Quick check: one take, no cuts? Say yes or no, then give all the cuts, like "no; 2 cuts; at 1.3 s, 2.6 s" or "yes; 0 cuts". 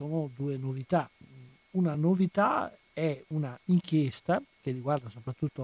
yes; 0 cuts